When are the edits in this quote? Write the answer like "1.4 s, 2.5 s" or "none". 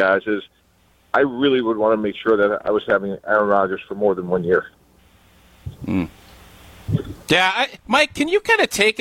7.8 s